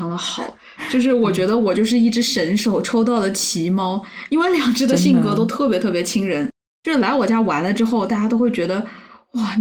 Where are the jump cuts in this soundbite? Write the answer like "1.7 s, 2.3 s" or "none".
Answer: none